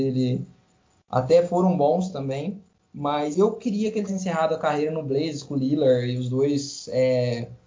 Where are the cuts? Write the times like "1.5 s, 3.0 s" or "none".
3.3 s, 4.1 s

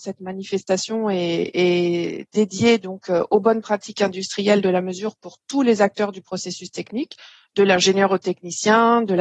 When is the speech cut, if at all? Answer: none

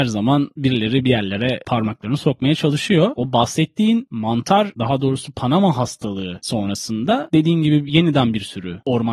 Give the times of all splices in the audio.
none

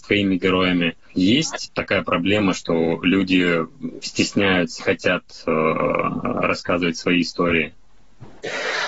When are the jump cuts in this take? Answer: 4.8 s

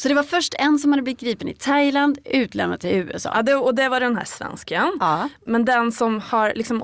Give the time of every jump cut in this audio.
none

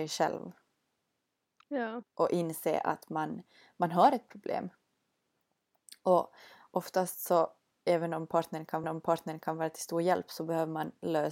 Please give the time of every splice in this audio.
8.8 s

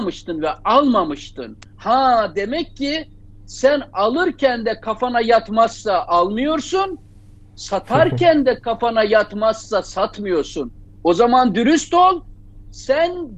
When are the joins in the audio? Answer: none

